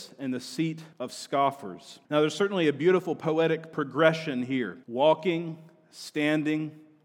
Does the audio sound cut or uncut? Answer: cut